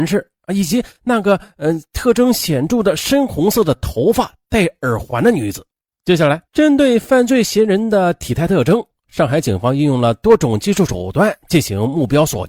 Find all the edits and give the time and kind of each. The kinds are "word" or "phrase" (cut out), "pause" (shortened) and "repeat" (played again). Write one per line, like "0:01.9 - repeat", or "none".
0:05.7 - pause
0:06.5 - pause